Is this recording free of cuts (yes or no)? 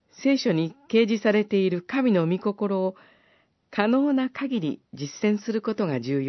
yes